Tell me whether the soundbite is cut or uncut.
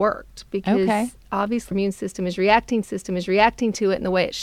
cut